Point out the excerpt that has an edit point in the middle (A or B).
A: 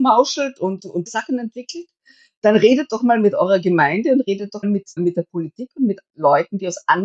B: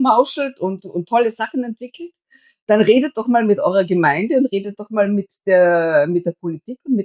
A